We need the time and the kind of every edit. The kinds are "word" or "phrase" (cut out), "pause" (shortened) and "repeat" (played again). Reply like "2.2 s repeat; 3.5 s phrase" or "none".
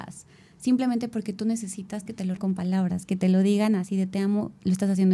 2.1 s phrase; 2.4 s word

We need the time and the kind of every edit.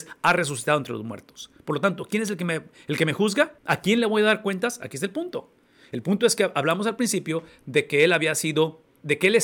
3.6 s pause

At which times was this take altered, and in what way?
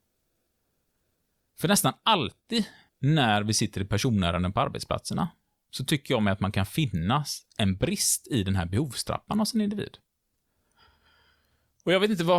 7.5 s pause

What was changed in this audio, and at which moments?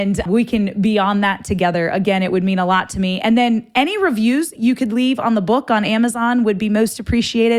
none

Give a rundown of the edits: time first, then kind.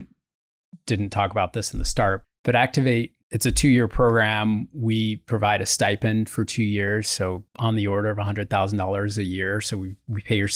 2.2 s word; 3.2 s pause; 7.5 s pause

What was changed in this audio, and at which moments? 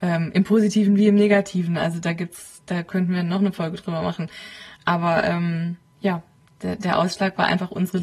none

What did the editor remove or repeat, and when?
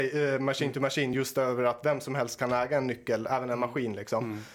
none

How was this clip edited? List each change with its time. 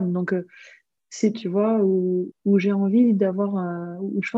1.3 s phrase; 2.3 s word

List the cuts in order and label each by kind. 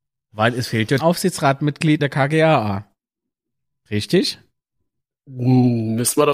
1.0 s word; 2.0 s word; 5.0 s pause

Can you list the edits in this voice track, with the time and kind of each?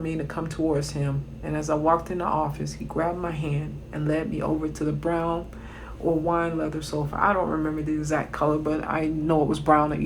none

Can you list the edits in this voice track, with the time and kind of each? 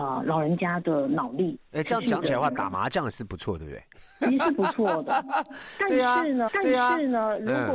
1.6 s pause; 6.5 s repeat

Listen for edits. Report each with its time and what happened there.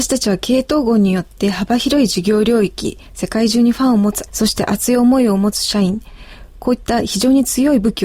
3.1 s pause; 4.3 s word

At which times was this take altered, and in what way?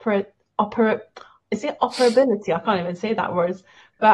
none

